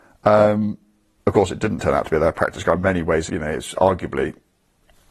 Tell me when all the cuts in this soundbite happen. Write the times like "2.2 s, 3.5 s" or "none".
3.3 s